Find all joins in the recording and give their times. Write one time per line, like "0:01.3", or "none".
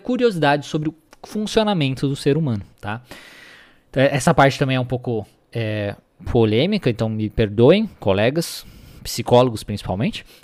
0:02.7